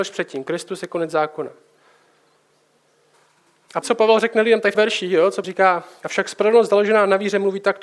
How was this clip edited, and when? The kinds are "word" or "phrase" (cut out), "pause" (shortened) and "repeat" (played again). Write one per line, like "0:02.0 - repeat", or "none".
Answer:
0:03.8 - word
0:04.7 - word
0:05.4 - word

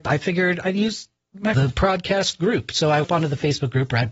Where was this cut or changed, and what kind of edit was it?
0:01.5 - word
0:03.0 - word

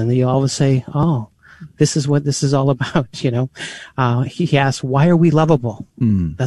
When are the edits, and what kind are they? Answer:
none

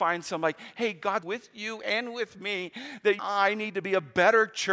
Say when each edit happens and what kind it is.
0:01.2 - phrase
0:03.2 - phrase

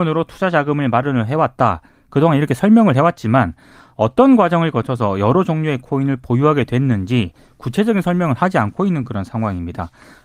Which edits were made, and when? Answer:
none

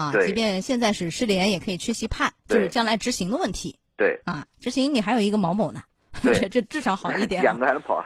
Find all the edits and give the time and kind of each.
0:02.4 - pause

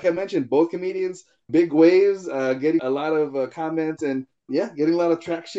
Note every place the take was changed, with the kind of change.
0:01.5 - word
0:02.8 - word
0:04.5 - word

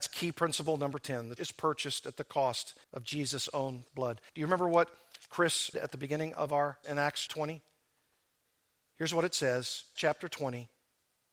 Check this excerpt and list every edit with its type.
0:01.4 - word
0:02.8 - pause
0:03.9 - word
0:04.3 - pause
0:05.7 - word
0:06.8 - word
0:07.3 - word
0:10.0 - word

